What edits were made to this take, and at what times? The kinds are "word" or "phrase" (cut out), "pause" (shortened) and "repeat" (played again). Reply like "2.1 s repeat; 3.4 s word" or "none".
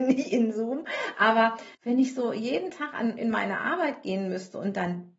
1.7 s pause